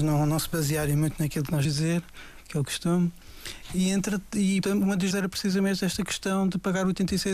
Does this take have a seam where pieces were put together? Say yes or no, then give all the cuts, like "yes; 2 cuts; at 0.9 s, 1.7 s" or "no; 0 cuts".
yes; 3 cuts; at 1.6 s, 4.6 s, 5.1 s